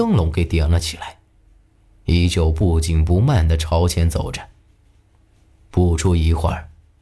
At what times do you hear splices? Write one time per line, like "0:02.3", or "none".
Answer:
none